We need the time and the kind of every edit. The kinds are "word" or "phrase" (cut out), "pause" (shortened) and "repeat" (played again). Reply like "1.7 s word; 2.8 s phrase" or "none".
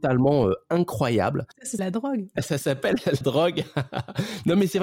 1.8 s word; 3.2 s word